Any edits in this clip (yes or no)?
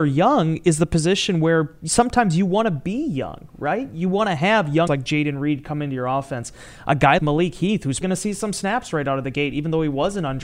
yes